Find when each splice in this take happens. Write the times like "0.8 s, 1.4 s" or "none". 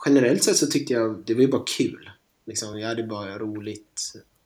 none